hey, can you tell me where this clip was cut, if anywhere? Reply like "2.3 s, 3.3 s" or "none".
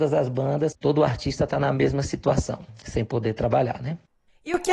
none